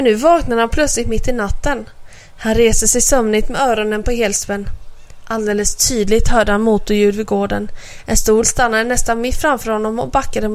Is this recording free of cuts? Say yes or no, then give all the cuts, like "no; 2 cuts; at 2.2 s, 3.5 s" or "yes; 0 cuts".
no; 1 cut; at 8.4 s